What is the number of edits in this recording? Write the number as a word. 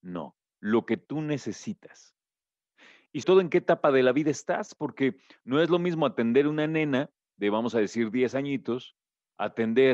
one